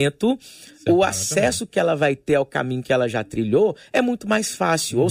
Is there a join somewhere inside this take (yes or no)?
no